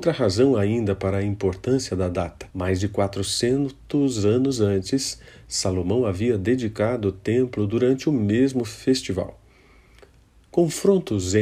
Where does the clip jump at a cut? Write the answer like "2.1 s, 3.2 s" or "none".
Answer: 2.5 s